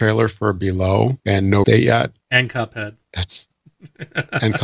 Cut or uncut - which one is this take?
cut